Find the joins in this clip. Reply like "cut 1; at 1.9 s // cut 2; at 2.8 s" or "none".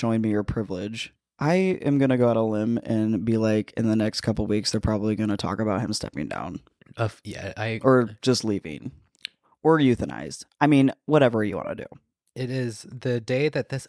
none

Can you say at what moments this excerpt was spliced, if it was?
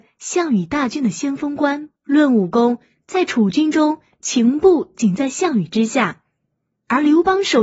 cut 1; at 2.0 s

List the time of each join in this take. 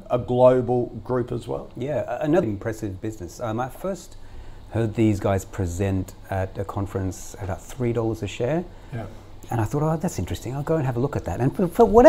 cut 1; at 2.4 s

